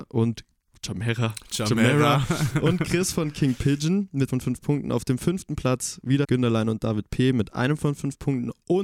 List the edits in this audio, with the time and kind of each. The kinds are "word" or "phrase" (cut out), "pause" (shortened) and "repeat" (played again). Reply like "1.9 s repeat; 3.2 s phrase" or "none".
4.3 s word; 6.2 s word